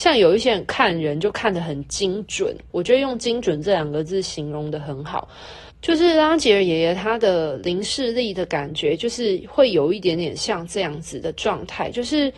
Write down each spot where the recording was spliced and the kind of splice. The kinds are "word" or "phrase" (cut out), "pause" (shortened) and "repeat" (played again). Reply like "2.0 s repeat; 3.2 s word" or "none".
2.7 s phrase; 5.7 s pause